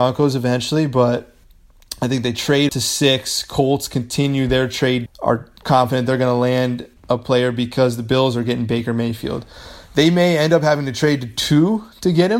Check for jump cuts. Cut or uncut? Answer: cut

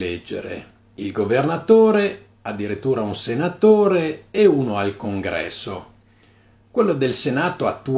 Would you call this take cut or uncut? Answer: uncut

